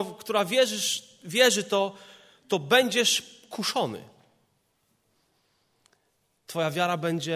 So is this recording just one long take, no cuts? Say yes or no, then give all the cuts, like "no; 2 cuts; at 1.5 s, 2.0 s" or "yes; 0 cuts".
yes; 0 cuts